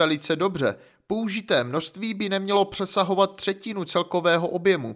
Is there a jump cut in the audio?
no; 0 cuts

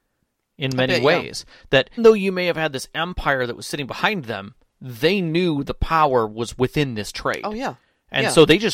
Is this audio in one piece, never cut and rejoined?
no; 1 cut; at 2.0 s

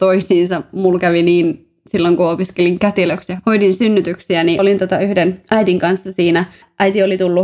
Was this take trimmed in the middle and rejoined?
no; 0 cuts

